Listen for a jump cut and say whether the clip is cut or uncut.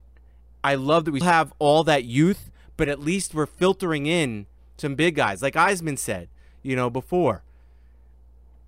cut